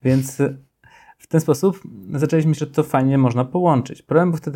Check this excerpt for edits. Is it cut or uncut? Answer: cut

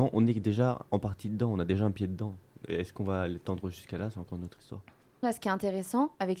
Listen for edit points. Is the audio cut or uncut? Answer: cut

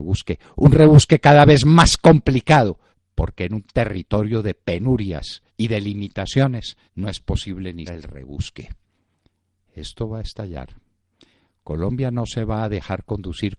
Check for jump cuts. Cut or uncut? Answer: cut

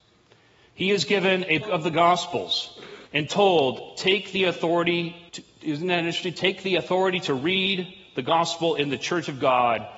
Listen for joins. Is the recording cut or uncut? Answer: cut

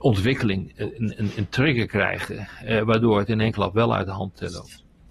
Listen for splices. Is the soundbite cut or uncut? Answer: uncut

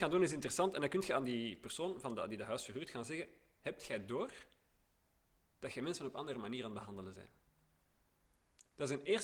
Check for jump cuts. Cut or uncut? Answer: uncut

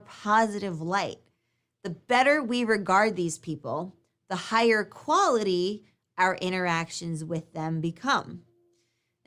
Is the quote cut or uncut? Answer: uncut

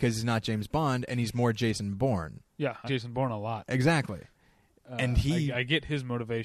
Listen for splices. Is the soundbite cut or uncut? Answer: cut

